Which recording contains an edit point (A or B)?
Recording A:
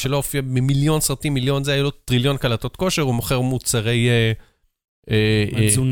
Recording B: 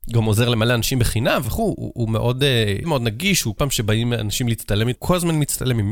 B